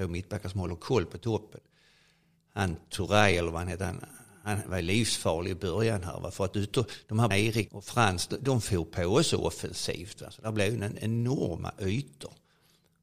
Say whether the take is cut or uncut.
cut